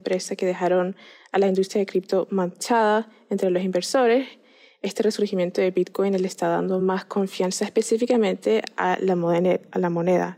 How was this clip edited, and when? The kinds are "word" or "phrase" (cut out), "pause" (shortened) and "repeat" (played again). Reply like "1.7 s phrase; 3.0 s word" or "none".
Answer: none